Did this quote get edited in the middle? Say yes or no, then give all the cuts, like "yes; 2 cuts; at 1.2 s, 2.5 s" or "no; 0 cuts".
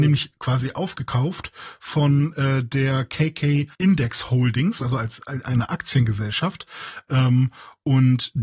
yes; 1 cut; at 3.7 s